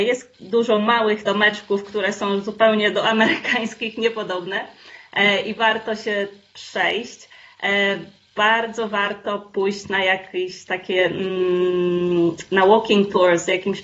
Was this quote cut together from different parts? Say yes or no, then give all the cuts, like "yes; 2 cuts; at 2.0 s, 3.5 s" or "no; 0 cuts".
yes; 1 cut; at 1.2 s